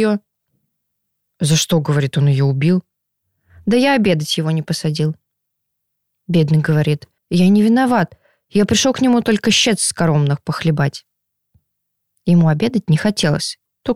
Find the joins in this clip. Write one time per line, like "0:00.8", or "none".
0:07.2